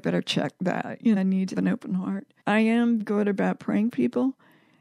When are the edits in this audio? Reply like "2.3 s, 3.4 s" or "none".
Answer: 1.2 s, 1.5 s, 2.4 s, 3.0 s, 3.9 s